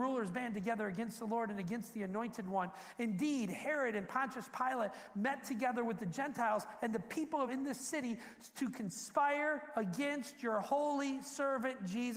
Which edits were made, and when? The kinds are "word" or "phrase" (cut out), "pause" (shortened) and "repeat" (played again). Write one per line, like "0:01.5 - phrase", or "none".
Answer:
0:07.5 - word